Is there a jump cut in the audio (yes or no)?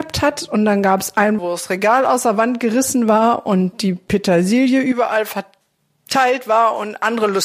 yes